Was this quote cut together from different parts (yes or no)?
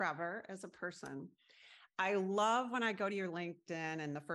no